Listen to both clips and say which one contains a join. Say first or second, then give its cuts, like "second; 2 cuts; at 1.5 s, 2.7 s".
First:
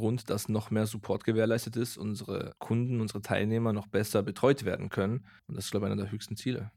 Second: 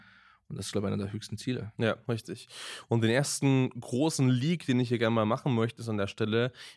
first; 2 cuts; at 2.6 s, 5.4 s